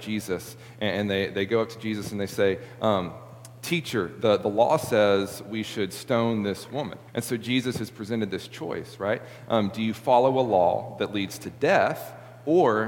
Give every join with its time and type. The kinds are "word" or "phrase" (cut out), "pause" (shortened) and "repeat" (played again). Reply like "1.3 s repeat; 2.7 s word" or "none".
7.1 s pause